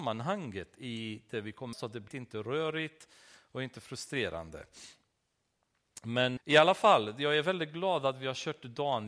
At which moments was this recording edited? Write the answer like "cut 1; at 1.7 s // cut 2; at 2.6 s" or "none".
cut 1; at 1.7 s // cut 2; at 2.1 s // cut 3; at 6.4 s

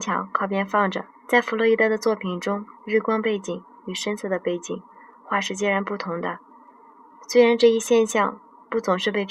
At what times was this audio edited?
cut 1; at 1.1 s // cut 2; at 2.8 s

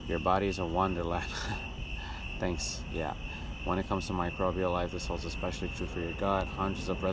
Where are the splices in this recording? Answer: none

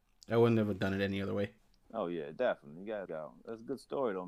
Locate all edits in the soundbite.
cut 1; at 1.6 s // cut 2; at 3.1 s

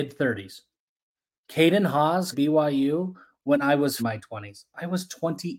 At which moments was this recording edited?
cut 1; at 2.3 s // cut 2; at 4.0 s

